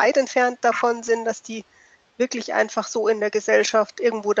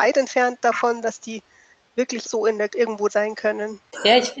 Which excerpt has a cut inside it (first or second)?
second